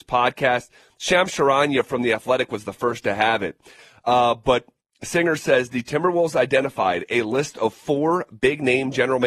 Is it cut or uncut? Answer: uncut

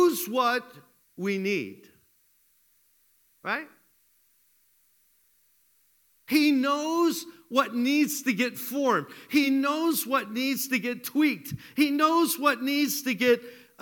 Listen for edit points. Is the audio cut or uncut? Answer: uncut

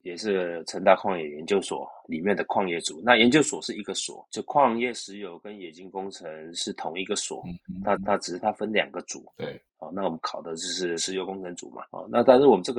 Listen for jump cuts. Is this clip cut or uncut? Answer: cut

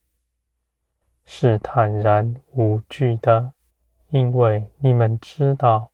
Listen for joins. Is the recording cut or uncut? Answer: cut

